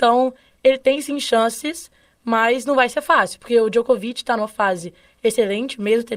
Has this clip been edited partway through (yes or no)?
no